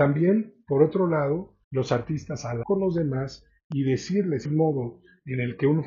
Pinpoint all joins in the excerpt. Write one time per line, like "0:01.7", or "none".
0:01.6
0:02.6
0:04.4